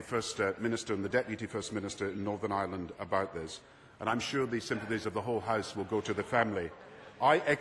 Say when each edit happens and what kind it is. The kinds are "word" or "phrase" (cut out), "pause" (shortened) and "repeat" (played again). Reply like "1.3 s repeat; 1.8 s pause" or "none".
none